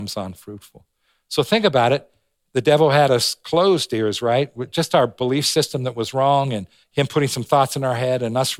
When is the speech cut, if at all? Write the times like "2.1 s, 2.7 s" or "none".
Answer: 6.8 s